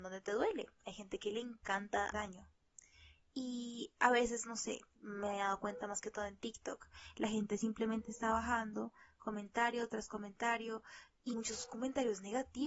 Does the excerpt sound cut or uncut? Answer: cut